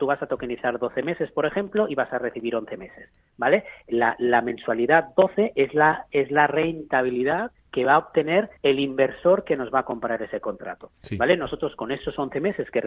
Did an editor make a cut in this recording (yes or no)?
yes